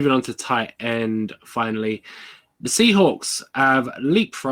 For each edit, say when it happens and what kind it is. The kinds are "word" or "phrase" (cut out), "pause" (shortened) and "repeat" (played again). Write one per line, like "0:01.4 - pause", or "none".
none

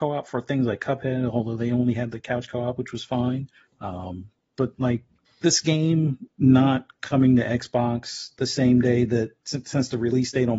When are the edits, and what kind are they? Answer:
0:03.6 - pause
0:05.3 - pause
0:06.3 - pause

